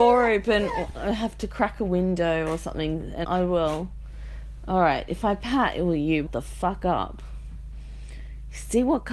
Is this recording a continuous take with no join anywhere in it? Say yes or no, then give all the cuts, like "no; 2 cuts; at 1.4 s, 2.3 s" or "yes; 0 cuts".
no; 2 cuts; at 3.2 s, 6.3 s